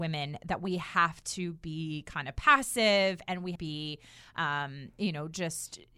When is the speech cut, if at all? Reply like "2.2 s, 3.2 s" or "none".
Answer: 3.6 s